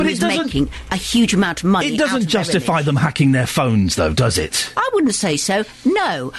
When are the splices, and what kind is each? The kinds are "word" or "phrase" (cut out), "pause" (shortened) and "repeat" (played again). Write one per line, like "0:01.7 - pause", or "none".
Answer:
none